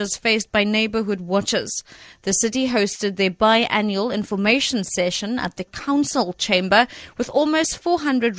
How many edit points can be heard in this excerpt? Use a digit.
1